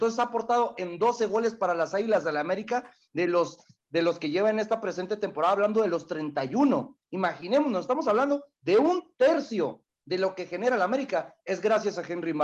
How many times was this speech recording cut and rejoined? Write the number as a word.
zero